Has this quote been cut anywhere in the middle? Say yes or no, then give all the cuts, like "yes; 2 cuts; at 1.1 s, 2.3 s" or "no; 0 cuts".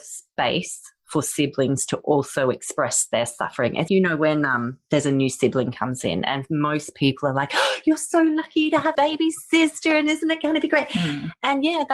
yes; 2 cuts; at 3.9 s, 8.9 s